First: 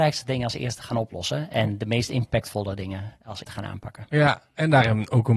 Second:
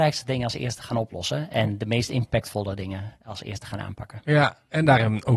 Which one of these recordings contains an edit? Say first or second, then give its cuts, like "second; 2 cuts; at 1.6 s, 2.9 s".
first; 1 cut; at 3.4 s